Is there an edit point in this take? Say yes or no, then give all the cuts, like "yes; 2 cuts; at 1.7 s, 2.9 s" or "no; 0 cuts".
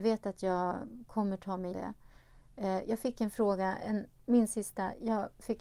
yes; 1 cut; at 1.7 s